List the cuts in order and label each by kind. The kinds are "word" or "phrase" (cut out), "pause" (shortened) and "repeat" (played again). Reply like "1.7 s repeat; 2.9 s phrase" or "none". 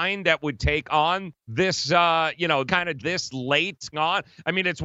1.4 s pause; 2.7 s word; 3.0 s word; 3.9 s word